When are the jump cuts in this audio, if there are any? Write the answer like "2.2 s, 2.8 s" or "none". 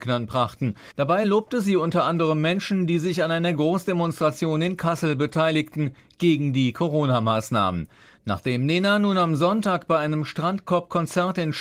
none